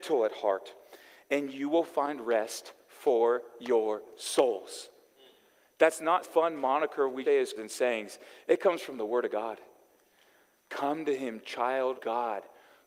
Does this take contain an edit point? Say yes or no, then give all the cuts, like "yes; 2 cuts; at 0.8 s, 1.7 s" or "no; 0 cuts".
yes; 4 cuts; at 6.2 s, 7.2 s, 7.6 s, 12.0 s